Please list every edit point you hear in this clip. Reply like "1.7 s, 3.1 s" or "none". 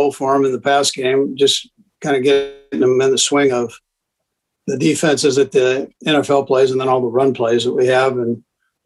5.9 s